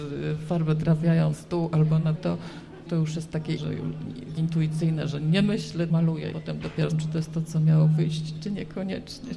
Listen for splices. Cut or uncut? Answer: cut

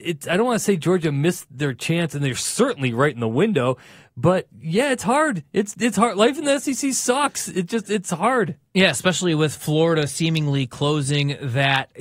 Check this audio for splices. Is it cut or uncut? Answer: uncut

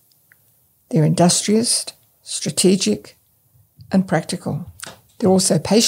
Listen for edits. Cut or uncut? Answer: uncut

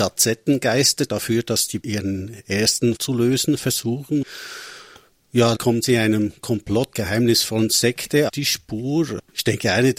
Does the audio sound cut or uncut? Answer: cut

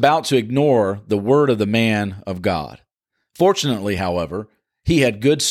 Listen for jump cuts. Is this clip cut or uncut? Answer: uncut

